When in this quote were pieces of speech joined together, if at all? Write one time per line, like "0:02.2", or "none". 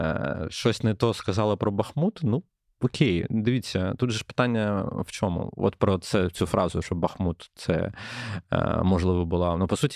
none